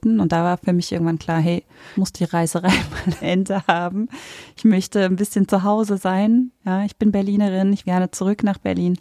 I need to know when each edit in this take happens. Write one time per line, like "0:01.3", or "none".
0:02.0
0:03.2
0:07.8